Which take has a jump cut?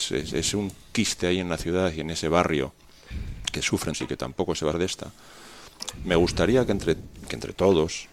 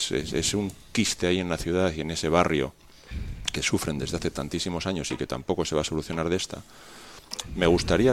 first; 2 cuts; at 3.9 s, 4.7 s

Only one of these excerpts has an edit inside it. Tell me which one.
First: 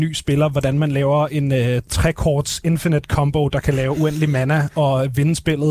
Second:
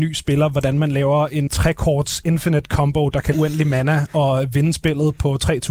second; 2 cuts; at 1.5 s, 3.3 s

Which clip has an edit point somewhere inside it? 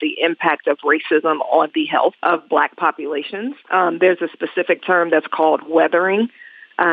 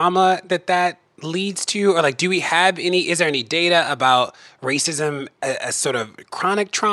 first; 2 cuts; at 2.2 s, 3.6 s

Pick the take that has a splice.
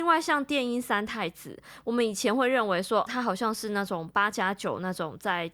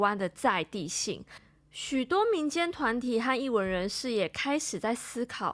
first; 1 cut; at 3.1 s

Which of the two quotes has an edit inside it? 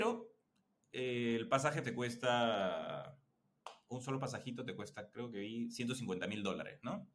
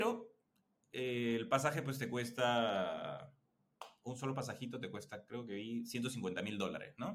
first; 1 cut; at 1.8 s

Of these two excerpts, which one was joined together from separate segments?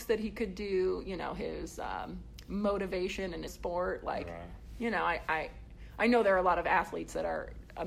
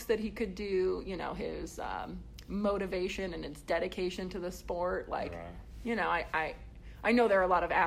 first; 1 cut; at 3.5 s

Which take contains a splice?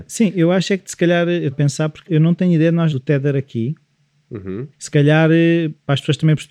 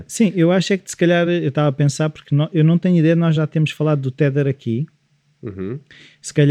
first; 4 cuts; at 1.5 s, 2.1 s, 2.9 s, 4.7 s

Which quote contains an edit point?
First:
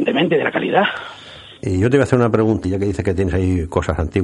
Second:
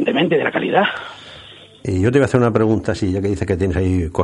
first; 2 cuts; at 1.6 s, 2.6 s

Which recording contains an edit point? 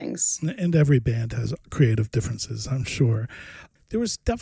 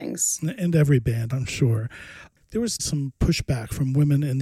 second; 2 cuts; at 1.3 s, 2.8 s

